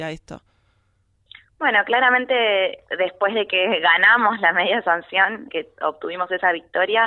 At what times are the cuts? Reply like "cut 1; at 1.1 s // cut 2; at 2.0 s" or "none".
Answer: cut 1; at 5.5 s